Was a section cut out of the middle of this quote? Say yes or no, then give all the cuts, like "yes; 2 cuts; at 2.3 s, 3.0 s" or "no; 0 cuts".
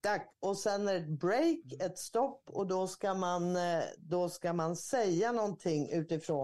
no; 0 cuts